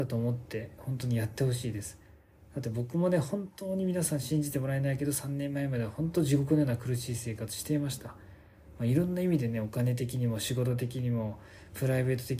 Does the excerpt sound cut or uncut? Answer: uncut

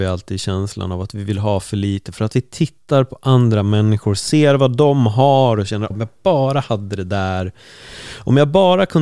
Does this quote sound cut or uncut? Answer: cut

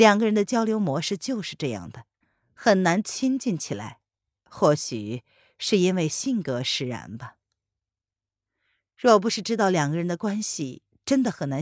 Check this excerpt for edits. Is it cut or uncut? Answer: uncut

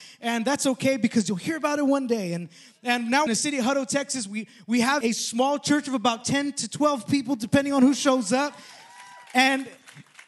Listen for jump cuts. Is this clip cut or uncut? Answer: cut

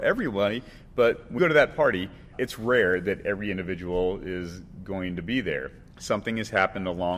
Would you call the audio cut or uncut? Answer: cut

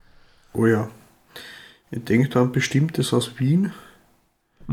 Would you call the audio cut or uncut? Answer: uncut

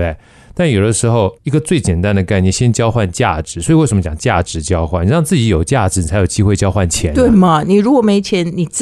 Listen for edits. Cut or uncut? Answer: cut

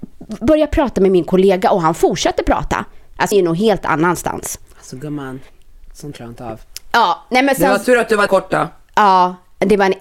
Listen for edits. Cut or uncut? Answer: cut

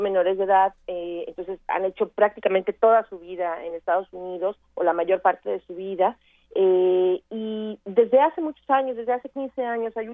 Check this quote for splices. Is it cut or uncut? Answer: uncut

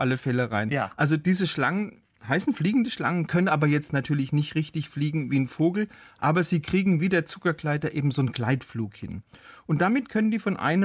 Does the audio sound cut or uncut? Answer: uncut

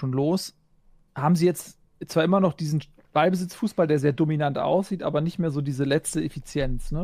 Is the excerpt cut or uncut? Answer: uncut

